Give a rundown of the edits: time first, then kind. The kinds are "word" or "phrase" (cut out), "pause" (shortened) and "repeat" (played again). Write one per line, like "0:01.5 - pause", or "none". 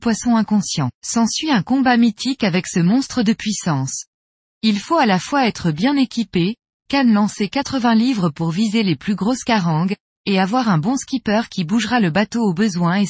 0:01.0 - pause